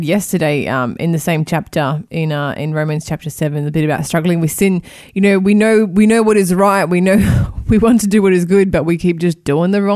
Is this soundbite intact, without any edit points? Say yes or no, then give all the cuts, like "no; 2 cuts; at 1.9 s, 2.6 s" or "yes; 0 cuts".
yes; 0 cuts